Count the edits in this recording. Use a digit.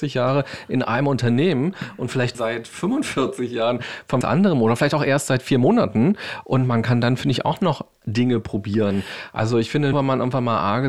4